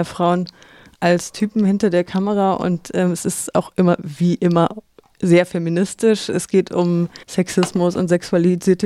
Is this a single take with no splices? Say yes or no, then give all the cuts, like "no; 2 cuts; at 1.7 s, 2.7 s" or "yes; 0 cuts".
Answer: no; 1 cut; at 7.2 s